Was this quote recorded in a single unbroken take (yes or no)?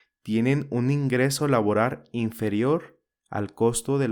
yes